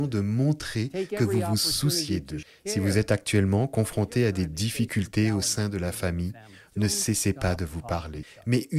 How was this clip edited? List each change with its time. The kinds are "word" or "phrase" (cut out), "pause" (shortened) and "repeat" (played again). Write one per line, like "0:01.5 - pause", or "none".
none